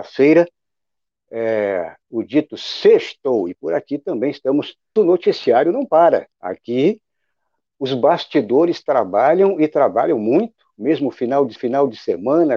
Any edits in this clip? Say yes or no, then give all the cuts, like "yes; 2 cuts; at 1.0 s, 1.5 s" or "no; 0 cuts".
yes; 3 cuts; at 5.0 s, 6.3 s, 11.6 s